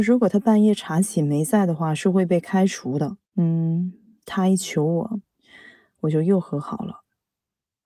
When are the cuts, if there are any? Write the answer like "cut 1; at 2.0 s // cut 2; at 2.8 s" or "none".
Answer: cut 1; at 3.3 s